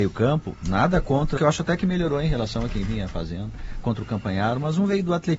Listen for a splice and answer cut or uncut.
cut